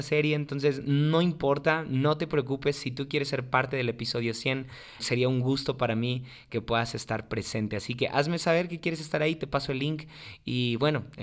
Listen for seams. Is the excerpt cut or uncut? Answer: cut